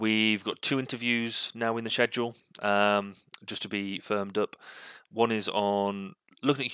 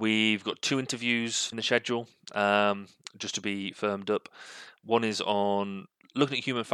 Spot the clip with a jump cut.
second; 1 cut; at 1.5 s

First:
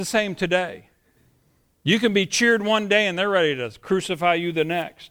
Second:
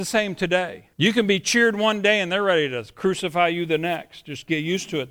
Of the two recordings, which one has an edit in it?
second; 1 cut; at 0.9 s

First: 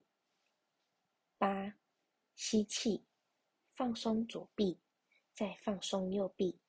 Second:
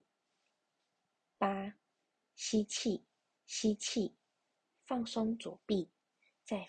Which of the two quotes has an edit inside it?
second; 1 cut; at 3.4 s

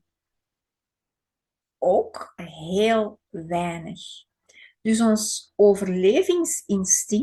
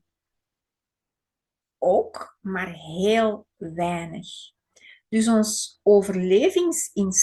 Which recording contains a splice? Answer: first; 1 cut; at 2.4 s

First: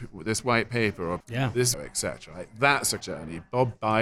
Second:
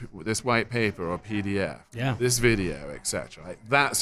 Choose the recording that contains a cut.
first; 3 cuts; at 1.2 s, 1.7 s, 3.0 s

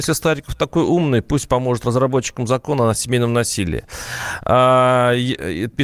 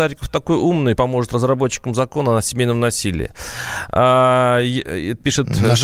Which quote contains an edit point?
second; 1 cut; at 1.0 s

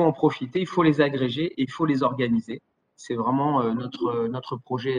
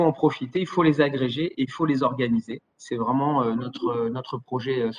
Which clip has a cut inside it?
second; 1 cut; at 2.7 s

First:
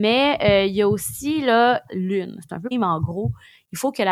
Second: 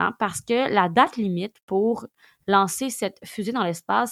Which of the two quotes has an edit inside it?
first; 2 cuts; at 1.9 s, 2.7 s

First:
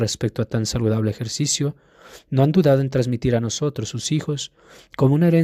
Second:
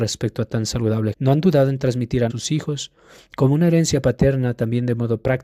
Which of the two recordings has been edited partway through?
second; 2 cuts; at 1.1 s, 2.3 s

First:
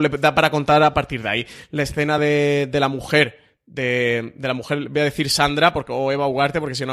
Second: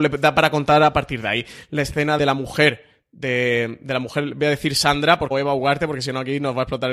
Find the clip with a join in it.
second; 2 cuts; at 2.2 s, 5.3 s

